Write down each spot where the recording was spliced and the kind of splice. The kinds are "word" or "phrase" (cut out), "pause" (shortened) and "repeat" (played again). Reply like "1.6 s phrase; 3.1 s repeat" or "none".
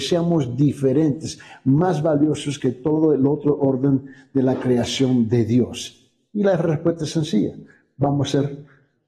none

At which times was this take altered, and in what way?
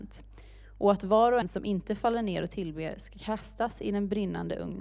1.4 s word

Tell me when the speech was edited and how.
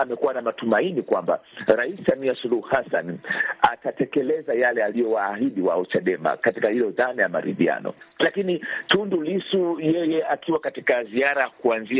8.1 s pause

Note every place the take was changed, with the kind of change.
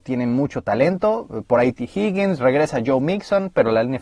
none

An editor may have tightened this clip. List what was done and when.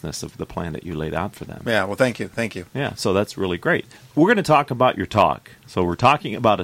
none

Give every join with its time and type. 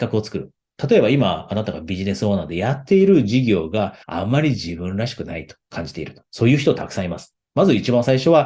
4.0 s pause; 5.6 s pause

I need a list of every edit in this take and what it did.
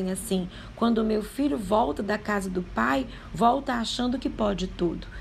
none

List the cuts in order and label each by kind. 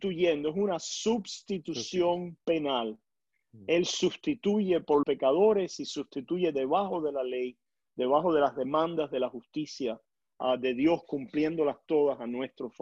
2.4 s pause; 5.0 s word

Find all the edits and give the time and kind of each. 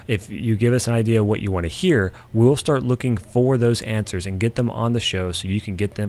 none

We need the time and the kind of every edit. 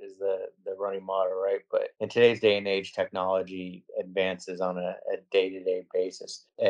1.9 s pause

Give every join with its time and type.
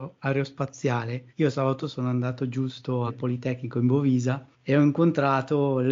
1.3 s pause; 1.8 s word; 3.1 s phrase; 4.5 s pause

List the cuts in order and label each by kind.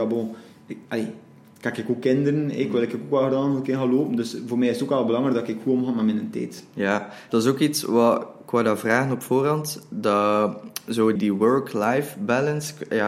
7.3 s word; 11.2 s word

